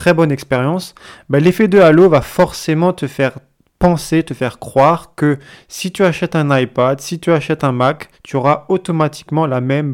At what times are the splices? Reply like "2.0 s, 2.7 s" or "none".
none